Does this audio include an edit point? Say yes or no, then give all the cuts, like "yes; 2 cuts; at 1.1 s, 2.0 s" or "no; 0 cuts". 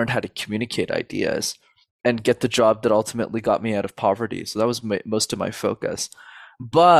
no; 0 cuts